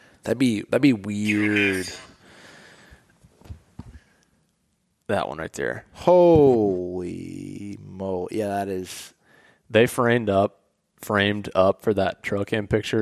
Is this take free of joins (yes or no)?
yes